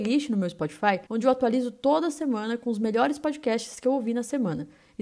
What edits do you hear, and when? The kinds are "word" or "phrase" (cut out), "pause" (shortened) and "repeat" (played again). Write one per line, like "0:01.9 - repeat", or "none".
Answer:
0:01.1 - pause